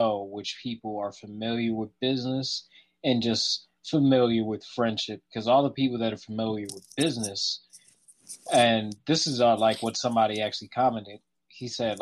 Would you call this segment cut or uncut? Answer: uncut